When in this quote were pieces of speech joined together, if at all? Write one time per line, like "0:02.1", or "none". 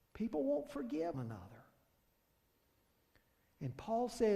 0:01.1